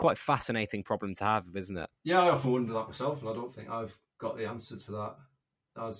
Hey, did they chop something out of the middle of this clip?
yes; 1 cut; at 2.0 s

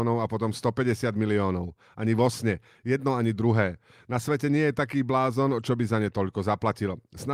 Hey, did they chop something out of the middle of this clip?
no; 0 cuts

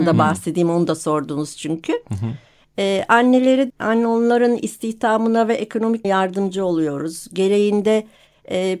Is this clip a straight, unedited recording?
no; 2 cuts; at 3.7 s, 6.0 s

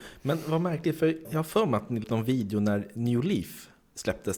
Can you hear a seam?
yes; 2 cuts; at 1.2 s, 2.0 s

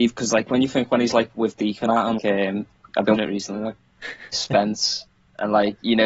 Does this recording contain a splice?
yes; 4 cuts; at 1.9 s, 2.2 s, 3.1 s, 4.3 s

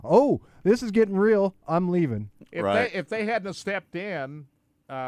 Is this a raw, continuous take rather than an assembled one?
yes; 0 cuts

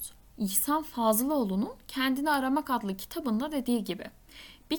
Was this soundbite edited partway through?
no; 0 cuts

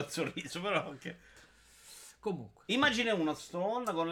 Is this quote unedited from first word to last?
yes; 0 cuts

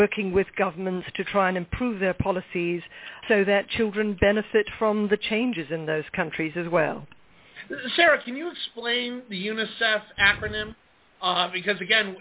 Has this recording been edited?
yes; 1 cut; at 3.2 s

